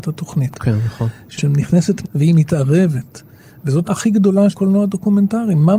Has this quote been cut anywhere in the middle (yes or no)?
yes